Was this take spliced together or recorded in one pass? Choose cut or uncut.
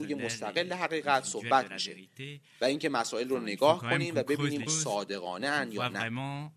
cut